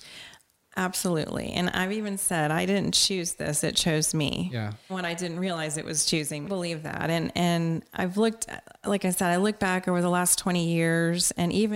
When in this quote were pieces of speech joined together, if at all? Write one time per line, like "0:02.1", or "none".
0:04.9
0:06.4